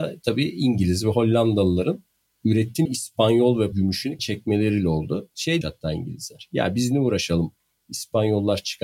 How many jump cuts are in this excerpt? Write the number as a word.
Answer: four